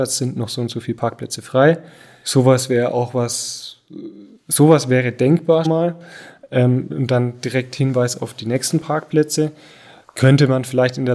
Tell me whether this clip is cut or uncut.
cut